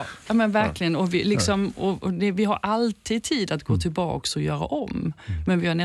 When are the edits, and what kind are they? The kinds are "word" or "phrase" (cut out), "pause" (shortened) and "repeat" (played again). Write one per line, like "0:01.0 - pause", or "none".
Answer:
none